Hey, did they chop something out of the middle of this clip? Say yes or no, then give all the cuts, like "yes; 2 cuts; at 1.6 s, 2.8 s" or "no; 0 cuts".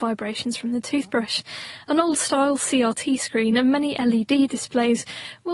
no; 0 cuts